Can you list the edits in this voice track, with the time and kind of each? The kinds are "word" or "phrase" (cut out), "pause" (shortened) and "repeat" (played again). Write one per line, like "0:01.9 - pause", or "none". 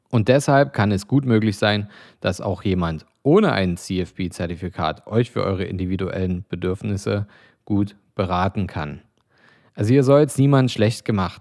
none